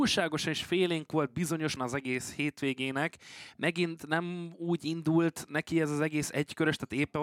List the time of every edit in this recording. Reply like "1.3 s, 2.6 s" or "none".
1.8 s